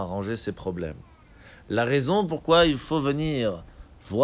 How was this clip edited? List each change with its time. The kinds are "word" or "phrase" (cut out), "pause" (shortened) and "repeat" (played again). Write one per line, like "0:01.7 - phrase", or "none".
none